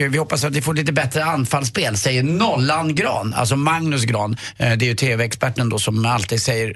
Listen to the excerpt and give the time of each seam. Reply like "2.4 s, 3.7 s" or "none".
none